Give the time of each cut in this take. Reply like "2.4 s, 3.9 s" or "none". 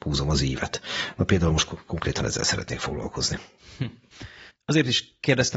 4.5 s